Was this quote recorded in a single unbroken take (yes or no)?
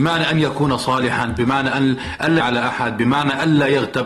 no